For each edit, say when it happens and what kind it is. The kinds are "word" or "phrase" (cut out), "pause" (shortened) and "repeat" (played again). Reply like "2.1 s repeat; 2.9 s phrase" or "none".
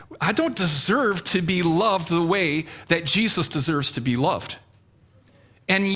none